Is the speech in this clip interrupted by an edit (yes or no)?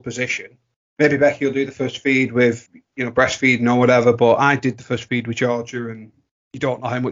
no